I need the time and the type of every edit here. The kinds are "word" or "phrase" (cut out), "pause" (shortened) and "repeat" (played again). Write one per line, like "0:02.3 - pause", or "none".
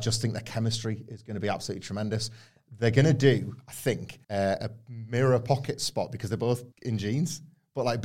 0:04.2 - pause
0:06.7 - pause